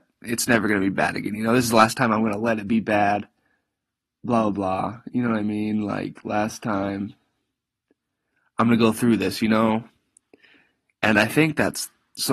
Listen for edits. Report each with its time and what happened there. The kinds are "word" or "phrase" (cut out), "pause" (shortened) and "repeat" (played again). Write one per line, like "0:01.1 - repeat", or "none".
none